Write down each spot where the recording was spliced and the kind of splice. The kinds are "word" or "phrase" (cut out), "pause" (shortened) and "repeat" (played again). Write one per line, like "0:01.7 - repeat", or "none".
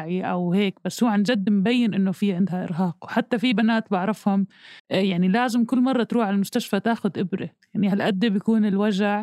0:04.8 - pause

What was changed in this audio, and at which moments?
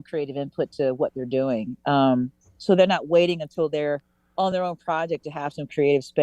none

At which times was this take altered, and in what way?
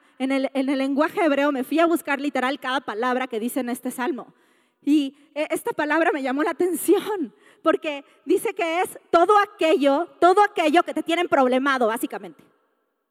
none

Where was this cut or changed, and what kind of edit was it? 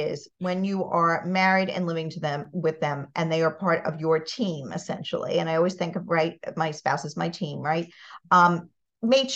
none

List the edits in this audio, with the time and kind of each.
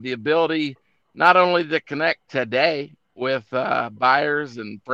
none

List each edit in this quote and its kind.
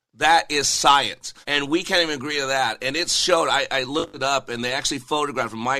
0:01.4 - pause

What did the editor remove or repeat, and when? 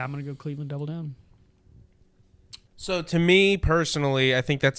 0:02.6 - pause

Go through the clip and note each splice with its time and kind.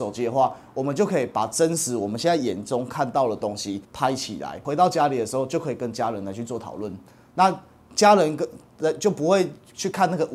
0:03.8 - pause

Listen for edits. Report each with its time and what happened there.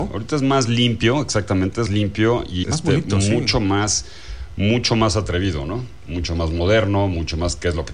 0:01.9 - word
0:02.6 - word

